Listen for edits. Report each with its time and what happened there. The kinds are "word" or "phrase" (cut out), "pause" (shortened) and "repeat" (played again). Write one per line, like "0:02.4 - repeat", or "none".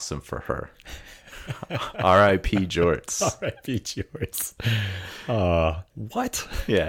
0:05.9 - pause